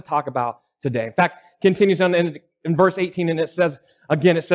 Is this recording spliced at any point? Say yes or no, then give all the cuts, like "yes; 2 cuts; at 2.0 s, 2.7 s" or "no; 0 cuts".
no; 0 cuts